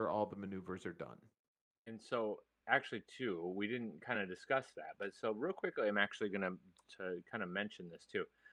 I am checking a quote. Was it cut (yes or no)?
no